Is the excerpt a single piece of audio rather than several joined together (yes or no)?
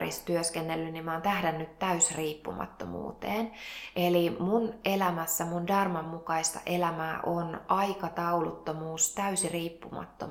yes